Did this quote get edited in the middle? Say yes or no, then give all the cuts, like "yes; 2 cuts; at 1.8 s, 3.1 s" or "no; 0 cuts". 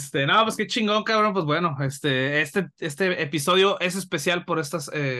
no; 0 cuts